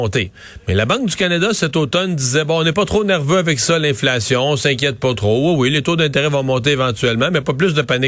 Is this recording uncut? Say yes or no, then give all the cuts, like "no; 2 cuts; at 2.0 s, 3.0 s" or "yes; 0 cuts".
yes; 0 cuts